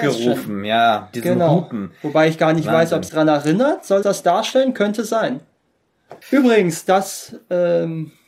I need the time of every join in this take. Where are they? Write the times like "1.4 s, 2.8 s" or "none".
1.1 s, 3.1 s, 4.0 s, 6.2 s